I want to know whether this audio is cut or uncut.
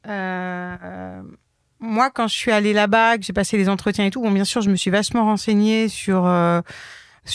uncut